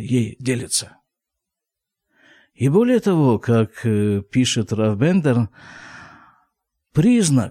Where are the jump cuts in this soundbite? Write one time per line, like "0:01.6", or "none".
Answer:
none